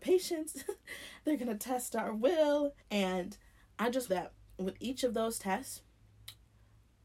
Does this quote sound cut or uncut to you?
cut